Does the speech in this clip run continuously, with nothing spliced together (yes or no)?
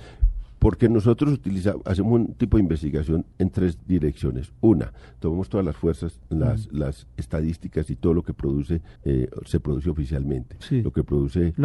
no